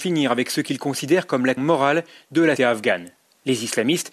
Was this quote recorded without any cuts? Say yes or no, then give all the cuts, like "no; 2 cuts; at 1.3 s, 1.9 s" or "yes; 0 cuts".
no; 2 cuts; at 1.6 s, 2.6 s